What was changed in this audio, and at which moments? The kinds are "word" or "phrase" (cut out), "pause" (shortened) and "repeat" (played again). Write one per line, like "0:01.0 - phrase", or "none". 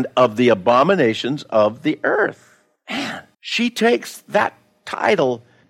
0:03.3 - pause